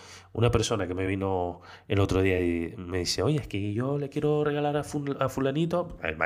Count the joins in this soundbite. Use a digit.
0